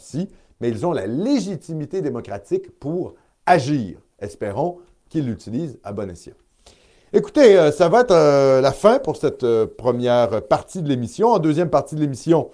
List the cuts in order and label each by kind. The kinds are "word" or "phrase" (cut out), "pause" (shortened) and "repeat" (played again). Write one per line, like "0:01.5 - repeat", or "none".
none